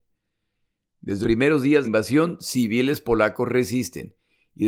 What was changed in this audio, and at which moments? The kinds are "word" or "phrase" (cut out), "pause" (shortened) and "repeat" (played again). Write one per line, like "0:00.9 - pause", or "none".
0:01.2 - word
0:01.8 - phrase